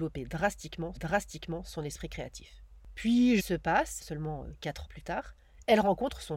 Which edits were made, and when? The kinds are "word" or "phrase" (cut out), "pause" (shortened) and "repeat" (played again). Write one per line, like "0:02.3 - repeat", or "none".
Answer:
0:01.0 - repeat
0:03.4 - word
0:04.0 - word
0:04.9 - word